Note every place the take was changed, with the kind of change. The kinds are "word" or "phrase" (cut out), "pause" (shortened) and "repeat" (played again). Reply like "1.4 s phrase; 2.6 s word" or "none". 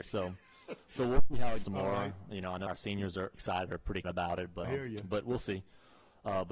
1.6 s word; 2.7 s word; 3.3 s word; 3.7 s word; 4.0 s word; 4.6 s word